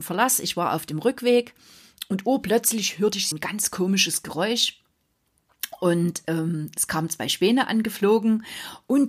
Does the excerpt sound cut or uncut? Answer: cut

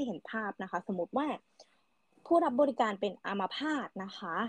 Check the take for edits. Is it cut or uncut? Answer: uncut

